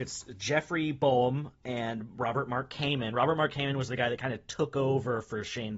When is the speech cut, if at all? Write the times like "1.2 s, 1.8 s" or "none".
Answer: none